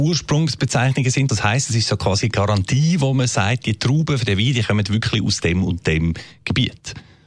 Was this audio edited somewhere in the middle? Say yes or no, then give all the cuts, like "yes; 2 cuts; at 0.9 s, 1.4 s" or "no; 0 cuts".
yes; 1 cut; at 1.3 s